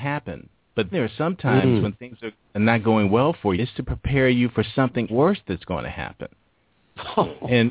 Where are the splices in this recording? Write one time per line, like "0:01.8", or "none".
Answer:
0:00.9
0:03.6
0:05.1